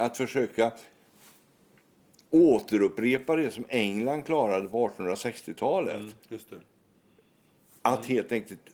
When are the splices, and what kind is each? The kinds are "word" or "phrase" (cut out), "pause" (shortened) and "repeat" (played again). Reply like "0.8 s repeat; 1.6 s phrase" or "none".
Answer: none